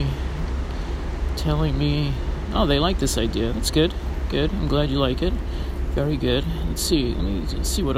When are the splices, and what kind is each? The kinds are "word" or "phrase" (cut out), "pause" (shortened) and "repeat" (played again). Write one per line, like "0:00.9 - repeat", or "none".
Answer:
none